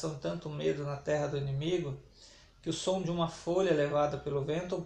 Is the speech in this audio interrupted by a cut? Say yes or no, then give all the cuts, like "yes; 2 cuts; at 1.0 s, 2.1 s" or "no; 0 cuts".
no; 0 cuts